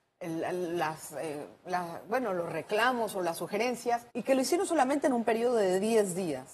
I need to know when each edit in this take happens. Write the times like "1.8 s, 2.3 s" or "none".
4.1 s

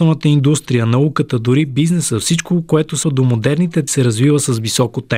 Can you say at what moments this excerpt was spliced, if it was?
3.0 s, 3.9 s

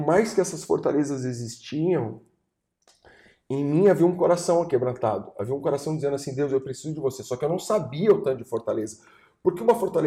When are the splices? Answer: none

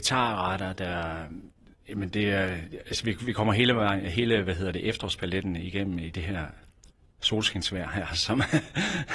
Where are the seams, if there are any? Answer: none

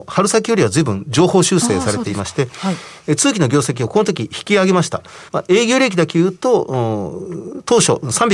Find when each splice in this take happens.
5.3 s

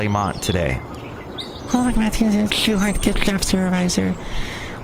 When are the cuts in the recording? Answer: 2.5 s

